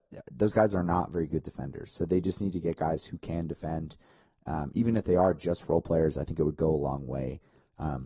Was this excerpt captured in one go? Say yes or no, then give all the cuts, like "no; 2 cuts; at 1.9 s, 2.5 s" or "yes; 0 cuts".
yes; 0 cuts